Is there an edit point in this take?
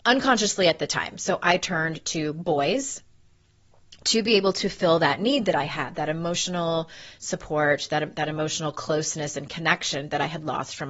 no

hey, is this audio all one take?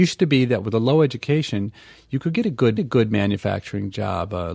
no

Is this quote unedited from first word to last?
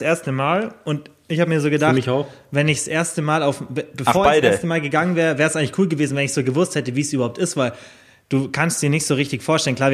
yes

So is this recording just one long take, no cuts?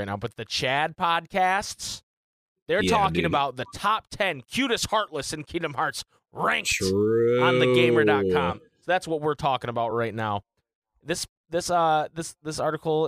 yes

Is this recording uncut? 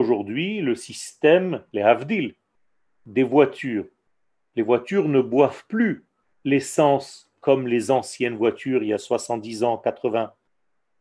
no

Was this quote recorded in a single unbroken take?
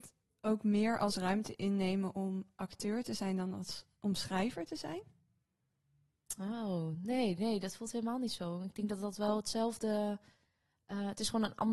yes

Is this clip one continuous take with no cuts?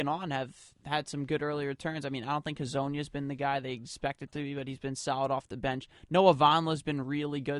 yes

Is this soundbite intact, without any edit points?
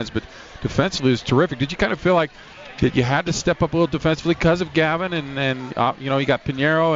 yes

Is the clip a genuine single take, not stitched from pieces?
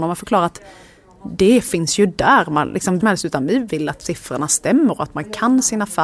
no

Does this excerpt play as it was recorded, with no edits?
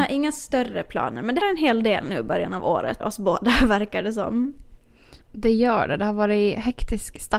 no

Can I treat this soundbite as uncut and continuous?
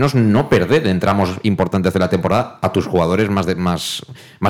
yes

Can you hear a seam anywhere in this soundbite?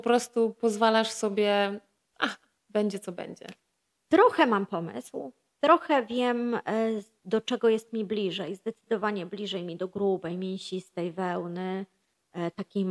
no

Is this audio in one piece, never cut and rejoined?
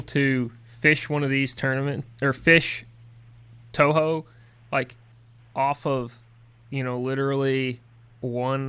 yes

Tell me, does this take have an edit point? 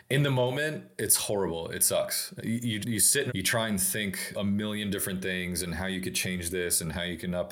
yes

